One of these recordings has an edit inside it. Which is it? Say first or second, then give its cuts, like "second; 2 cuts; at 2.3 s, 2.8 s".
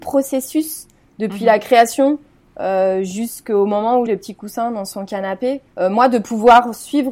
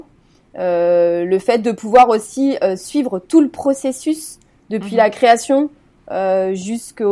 first; 2 cuts; at 4.1 s, 5.7 s